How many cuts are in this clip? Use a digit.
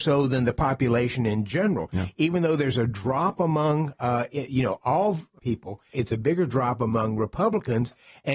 0